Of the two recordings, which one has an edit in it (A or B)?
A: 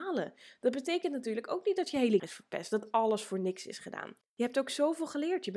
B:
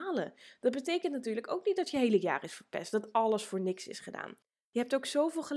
A